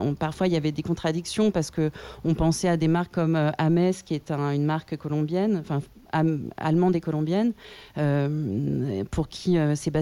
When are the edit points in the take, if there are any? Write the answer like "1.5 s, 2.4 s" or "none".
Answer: none